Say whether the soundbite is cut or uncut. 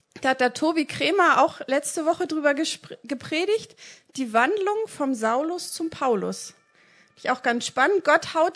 uncut